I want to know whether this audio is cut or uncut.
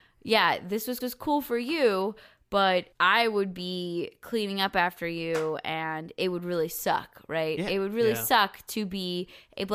cut